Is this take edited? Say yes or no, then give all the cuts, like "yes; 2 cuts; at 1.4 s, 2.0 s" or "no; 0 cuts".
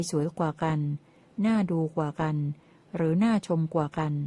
no; 0 cuts